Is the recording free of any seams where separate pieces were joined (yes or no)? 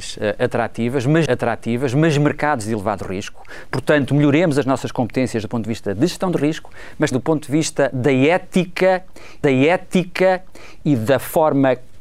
no